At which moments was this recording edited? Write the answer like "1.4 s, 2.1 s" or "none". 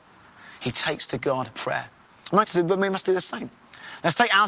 1.5 s, 2.4 s